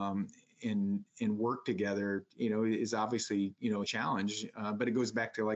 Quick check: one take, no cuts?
no; 1 cut; at 3.9 s

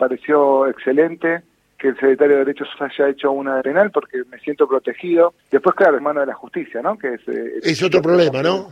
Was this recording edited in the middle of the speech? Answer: yes; 4 cuts; at 2.7 s, 3.6 s, 5.4 s, 6.0 s

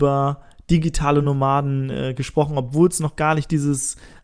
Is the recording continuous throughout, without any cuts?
yes; 0 cuts

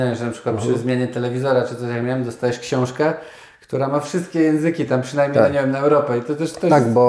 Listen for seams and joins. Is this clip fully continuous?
yes; 0 cuts

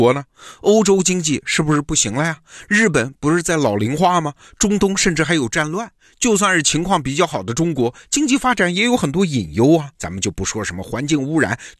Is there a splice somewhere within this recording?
yes; 1 cut; at 9.9 s

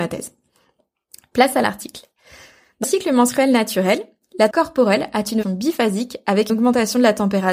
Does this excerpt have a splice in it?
yes; 4 cuts; at 2.8 s, 4.5 s, 5.4 s, 6.5 s

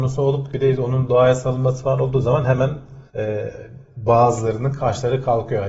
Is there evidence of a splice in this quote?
yes; 1 cut; at 3.1 s

